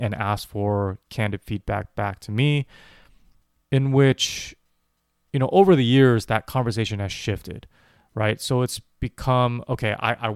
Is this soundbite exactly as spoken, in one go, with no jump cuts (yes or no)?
yes